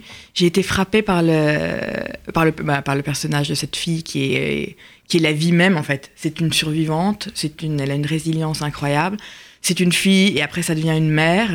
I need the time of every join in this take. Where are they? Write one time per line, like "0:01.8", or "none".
none